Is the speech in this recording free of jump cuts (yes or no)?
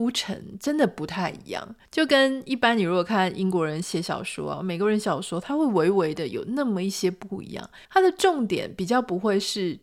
no